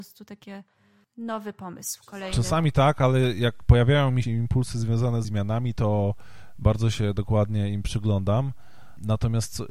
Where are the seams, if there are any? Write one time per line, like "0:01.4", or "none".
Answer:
0:04.2
0:05.2